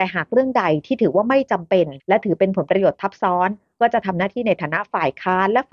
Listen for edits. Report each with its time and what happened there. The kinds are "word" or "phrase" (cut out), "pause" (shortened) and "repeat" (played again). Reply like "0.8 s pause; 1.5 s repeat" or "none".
2.0 s pause